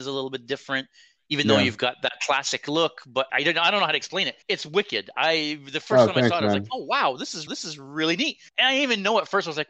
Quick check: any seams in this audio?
yes; 4 cuts; at 3.3 s, 4.4 s, 7.5 s, 8.5 s

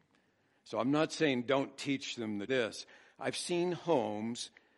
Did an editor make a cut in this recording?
yes; 1 cut; at 2.5 s

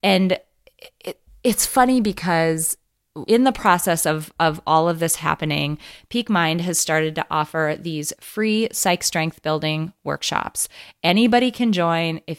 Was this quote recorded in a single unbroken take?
no; 1 cut; at 3.3 s

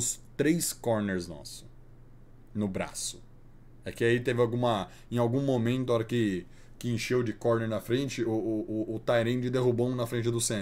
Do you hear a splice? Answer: no; 0 cuts

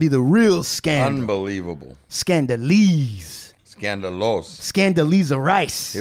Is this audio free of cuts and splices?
yes; 0 cuts

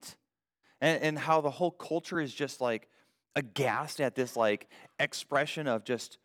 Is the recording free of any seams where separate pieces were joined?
yes; 0 cuts

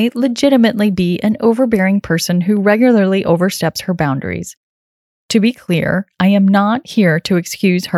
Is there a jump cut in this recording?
no; 0 cuts

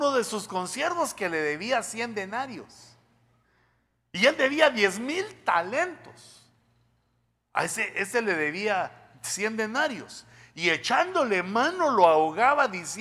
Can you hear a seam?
no; 0 cuts

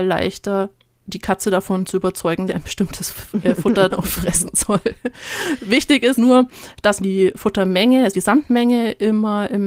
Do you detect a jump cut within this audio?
yes; 5 cuts; at 2.5 s, 3.9 s, 6.1 s, 7.0 s, 8.1 s

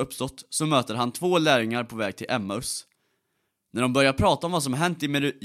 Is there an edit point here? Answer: no; 0 cuts

